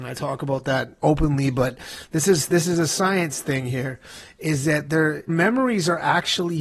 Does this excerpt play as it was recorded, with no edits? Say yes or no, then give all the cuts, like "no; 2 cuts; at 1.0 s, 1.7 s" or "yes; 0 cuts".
no; 1 cut; at 5.3 s